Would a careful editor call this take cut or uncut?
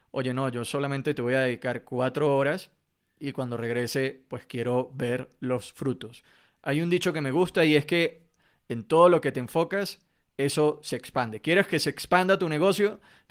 uncut